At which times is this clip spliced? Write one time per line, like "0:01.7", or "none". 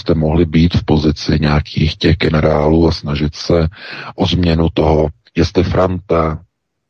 none